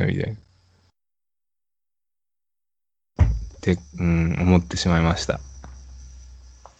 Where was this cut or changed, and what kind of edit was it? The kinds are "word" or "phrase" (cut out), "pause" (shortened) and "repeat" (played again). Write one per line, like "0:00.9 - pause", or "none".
0:03.9 - pause